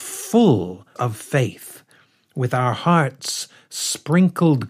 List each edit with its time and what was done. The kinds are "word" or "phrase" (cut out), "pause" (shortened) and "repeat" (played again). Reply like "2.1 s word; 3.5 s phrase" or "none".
1.0 s word